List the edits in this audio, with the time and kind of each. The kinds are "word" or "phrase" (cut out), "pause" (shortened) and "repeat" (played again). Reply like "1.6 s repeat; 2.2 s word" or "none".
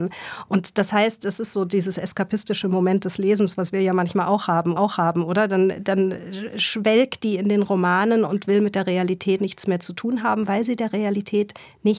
4.8 s repeat; 9.4 s word